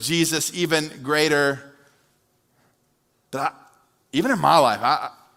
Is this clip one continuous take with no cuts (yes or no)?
yes